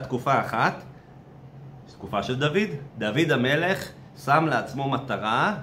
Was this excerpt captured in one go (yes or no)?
yes